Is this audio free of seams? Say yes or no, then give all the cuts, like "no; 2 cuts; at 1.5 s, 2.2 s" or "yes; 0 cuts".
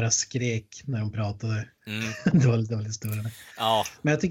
no; 1 cut; at 1.8 s